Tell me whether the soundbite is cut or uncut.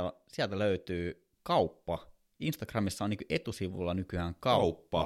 cut